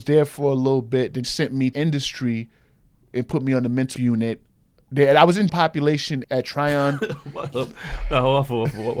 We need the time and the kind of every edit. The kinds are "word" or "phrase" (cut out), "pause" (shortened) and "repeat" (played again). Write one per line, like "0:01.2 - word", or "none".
0:01.2 - word
0:01.7 - word
0:04.0 - word
0:05.5 - word
0:06.2 - word
0:07.5 - word